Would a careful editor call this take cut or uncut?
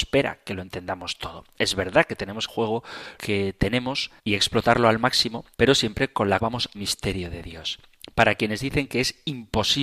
cut